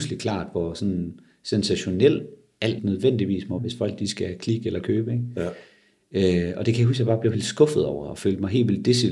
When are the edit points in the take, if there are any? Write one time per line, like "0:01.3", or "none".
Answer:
0:02.8
0:03.6
0:07.3